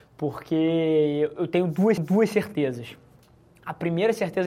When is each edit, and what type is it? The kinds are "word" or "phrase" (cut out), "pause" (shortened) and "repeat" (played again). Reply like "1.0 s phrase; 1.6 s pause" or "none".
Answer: 2.0 s repeat